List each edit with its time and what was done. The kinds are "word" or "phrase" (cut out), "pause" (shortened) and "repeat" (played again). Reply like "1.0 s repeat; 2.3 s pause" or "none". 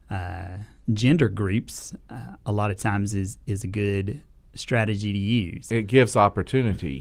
none